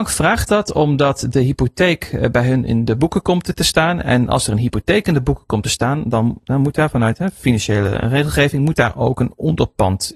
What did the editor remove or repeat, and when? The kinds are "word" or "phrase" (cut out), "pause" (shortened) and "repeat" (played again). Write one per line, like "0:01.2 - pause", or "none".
none